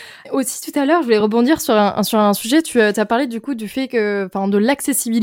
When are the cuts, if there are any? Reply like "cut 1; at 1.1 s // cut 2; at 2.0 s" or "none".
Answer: none